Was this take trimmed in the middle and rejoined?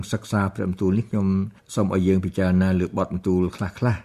yes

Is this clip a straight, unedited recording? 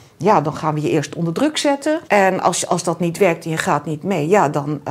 no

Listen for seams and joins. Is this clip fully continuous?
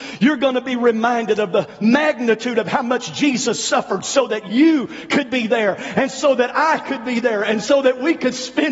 yes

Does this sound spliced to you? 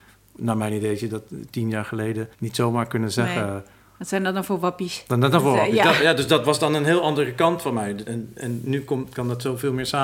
yes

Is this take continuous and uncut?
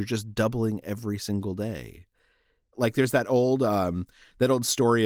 yes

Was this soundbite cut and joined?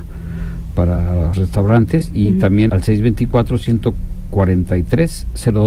yes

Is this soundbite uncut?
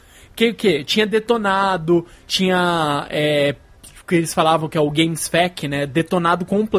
yes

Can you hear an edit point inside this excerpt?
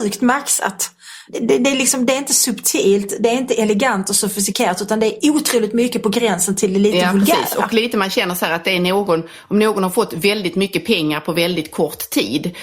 no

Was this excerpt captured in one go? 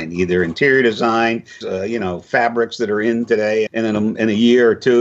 no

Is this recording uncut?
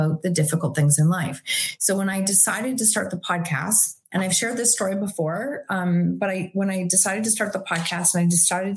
yes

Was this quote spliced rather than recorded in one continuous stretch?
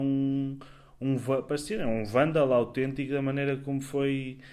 no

